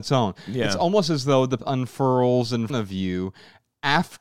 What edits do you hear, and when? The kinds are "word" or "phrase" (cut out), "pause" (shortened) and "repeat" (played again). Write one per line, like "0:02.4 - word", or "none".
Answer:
0:01.6 - word
0:02.7 - word